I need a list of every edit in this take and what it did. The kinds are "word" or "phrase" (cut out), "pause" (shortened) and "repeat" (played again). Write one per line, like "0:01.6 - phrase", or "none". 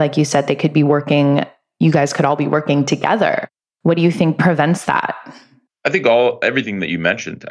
none